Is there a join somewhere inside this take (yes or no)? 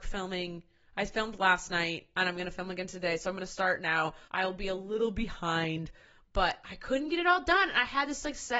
yes